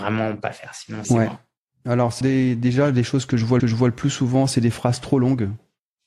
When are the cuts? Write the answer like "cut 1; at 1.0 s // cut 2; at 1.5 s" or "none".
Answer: cut 1; at 1.0 s // cut 2; at 2.2 s // cut 3; at 3.6 s